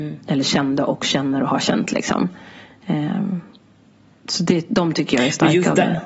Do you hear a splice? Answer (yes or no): no